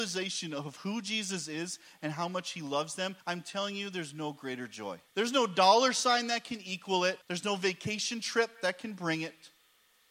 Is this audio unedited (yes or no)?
no